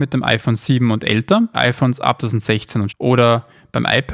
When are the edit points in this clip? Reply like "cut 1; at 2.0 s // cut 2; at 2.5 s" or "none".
cut 1; at 1.5 s // cut 2; at 2.2 s // cut 3; at 2.9 s